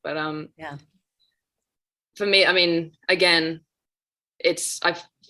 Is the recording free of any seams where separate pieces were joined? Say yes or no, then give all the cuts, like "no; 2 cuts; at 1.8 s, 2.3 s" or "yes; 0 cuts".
yes; 0 cuts